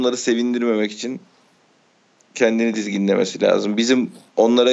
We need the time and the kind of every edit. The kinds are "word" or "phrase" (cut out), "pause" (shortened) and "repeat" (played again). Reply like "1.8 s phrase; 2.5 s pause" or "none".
none

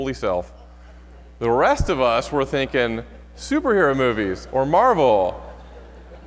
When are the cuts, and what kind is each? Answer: none

